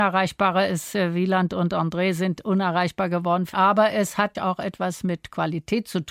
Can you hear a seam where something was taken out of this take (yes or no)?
yes